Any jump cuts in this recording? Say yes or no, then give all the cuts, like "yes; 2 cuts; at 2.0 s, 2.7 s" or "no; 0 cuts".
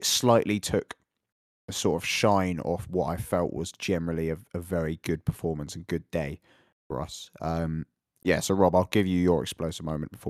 no; 0 cuts